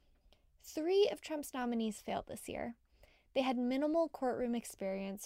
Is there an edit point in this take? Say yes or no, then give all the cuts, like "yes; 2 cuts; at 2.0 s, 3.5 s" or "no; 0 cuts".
no; 0 cuts